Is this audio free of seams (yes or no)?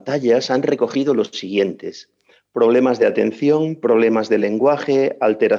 yes